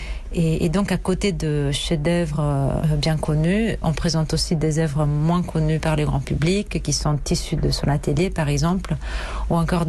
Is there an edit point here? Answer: yes; 1 cut; at 3.8 s

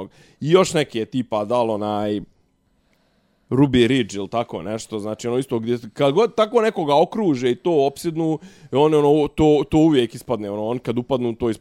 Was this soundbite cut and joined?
no; 0 cuts

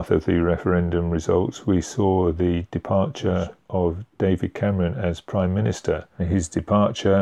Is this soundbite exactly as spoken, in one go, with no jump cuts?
yes; 0 cuts

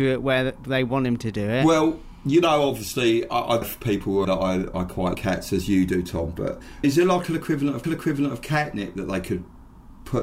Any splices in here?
yes; 6 cuts; at 3.6 s, 4.2 s, 4.7 s, 5.1 s, 6.8 s, 7.8 s

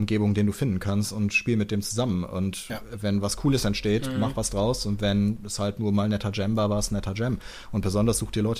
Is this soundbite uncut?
yes; 0 cuts

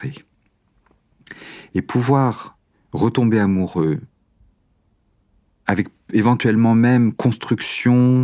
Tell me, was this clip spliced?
no; 0 cuts

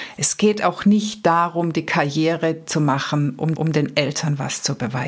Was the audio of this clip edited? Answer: yes; 1 cut; at 3.5 s

